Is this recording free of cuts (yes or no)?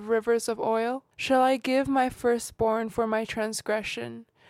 no